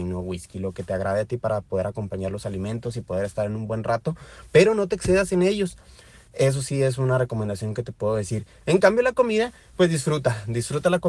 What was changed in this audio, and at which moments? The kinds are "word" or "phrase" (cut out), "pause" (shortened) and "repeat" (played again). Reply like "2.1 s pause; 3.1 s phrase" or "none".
none